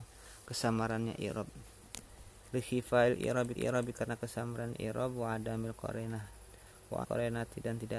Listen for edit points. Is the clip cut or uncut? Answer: cut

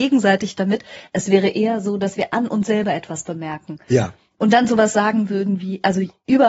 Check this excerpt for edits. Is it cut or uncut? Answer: uncut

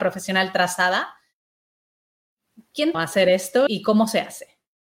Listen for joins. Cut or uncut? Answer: cut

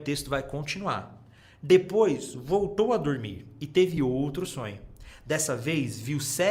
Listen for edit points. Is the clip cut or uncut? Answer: uncut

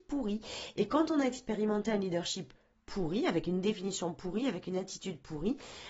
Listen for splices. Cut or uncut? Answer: uncut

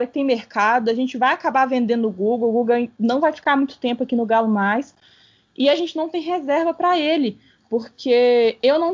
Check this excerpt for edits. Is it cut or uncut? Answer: uncut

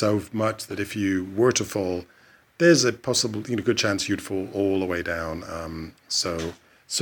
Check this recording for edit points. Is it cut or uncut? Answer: uncut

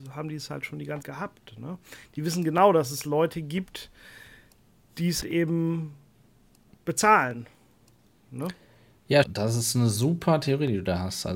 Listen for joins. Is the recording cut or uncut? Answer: cut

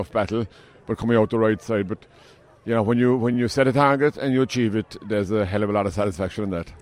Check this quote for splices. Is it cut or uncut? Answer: uncut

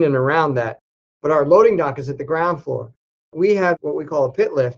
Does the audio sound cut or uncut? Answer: uncut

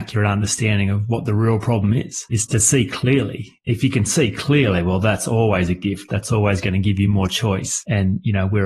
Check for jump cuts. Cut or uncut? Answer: uncut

